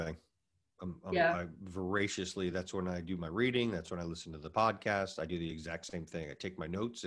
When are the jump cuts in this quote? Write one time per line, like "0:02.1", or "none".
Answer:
none